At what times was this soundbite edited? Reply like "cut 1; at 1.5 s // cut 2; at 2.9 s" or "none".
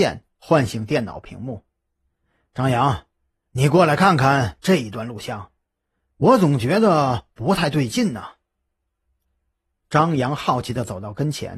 none